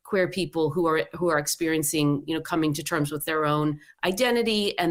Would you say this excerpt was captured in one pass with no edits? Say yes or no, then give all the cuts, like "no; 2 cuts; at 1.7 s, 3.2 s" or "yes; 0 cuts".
yes; 0 cuts